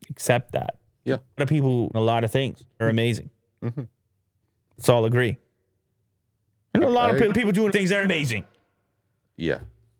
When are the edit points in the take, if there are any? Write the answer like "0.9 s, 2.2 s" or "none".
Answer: 1.4 s, 1.9 s, 2.8 s, 6.8 s, 7.3 s, 7.7 s, 8.0 s